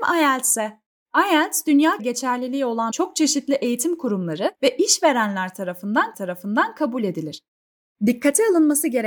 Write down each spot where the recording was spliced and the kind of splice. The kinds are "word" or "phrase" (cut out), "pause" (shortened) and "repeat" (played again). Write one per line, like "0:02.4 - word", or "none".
0:02.0 - word
0:02.9 - phrase
0:04.5 - pause
0:06.1 - repeat